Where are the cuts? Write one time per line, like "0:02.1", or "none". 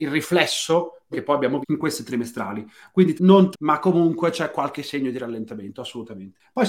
0:01.1
0:01.6
0:03.2
0:03.5